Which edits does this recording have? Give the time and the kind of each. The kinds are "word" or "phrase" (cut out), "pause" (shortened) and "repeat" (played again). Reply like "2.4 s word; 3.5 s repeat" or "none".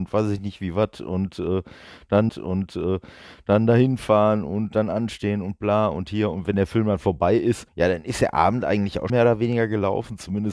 2.3 s repeat; 7.7 s pause; 9.1 s word

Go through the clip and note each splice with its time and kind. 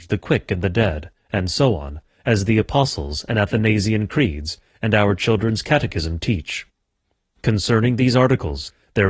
none

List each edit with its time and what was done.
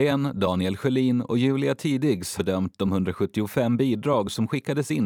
2.4 s phrase

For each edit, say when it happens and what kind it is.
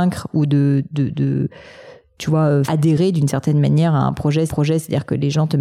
2.7 s word; 4.5 s repeat

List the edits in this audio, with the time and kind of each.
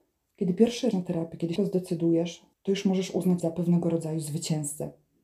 0.9 s phrase; 1.6 s word; 2.5 s pause; 3.4 s word

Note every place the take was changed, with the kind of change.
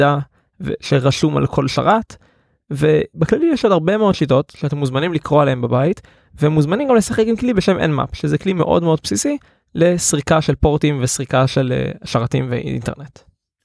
none

